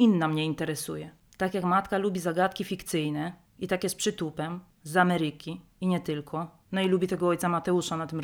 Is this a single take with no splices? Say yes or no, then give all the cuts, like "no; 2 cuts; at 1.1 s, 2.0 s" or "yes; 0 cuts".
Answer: no; 1 cut; at 6.6 s